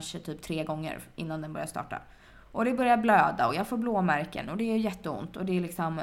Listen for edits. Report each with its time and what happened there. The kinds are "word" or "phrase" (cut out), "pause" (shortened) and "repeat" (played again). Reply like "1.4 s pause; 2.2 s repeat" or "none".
none